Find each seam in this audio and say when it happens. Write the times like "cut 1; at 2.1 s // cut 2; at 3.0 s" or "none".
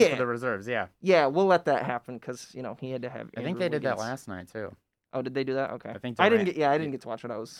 none